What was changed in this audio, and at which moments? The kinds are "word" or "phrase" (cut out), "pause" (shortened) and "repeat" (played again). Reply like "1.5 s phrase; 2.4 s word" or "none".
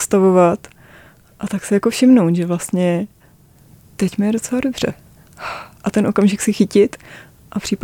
none